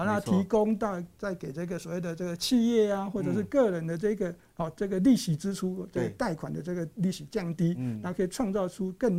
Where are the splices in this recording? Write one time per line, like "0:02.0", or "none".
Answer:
none